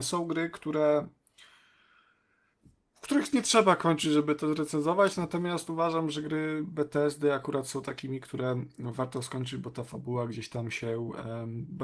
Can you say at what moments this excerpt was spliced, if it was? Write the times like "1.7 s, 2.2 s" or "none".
none